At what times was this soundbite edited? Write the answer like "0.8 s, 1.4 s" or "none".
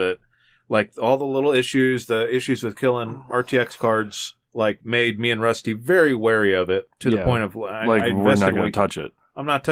4.4 s